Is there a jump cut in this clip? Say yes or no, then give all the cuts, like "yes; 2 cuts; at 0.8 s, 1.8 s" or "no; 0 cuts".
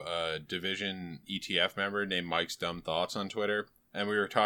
no; 0 cuts